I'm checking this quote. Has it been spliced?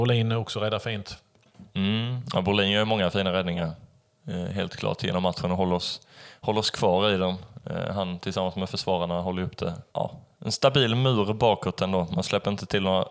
yes; 1 cut; at 9.9 s

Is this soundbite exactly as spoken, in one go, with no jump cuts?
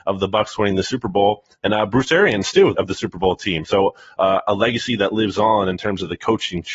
no; 1 cut; at 2.7 s

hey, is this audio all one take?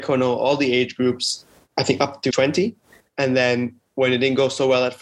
no; 1 cut; at 2.3 s

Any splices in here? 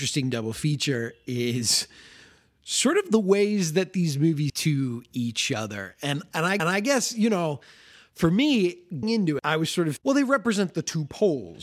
yes; 5 cuts; at 4.5 s, 6.6 s, 9.0 s, 9.4 s, 10.0 s

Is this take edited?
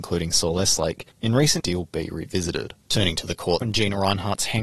yes; 4 cuts; at 1.1 s, 1.6 s, 2.8 s, 3.6 s

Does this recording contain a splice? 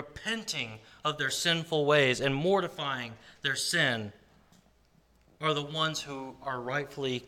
no; 0 cuts

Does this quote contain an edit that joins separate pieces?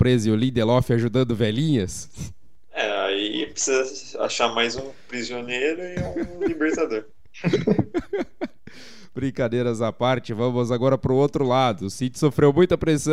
no; 0 cuts

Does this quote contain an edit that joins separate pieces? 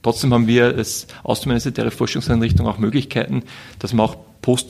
no; 0 cuts

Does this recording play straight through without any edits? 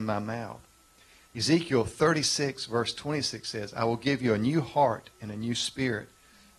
yes; 0 cuts

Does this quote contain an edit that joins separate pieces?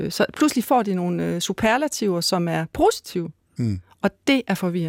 no; 0 cuts

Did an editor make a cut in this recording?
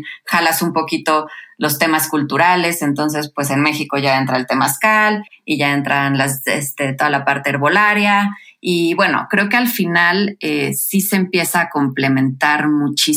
no; 0 cuts

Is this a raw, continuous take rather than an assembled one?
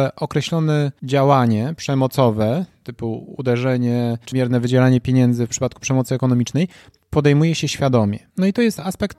yes; 0 cuts

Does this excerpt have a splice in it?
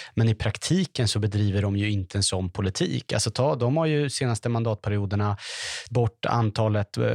yes; 1 cut; at 5.9 s

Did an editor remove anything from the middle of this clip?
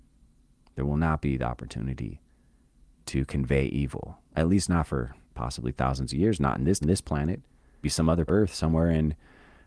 yes; 4 cuts; at 5.2 s, 6.8 s, 7.8 s, 8.3 s

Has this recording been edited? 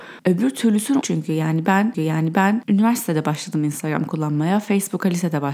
yes; 2 cuts; at 1.0 s, 1.9 s

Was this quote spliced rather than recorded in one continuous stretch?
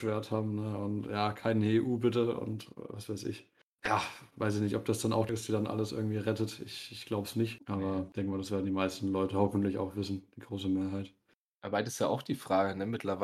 yes; 2 cuts; at 3.7 s, 5.3 s

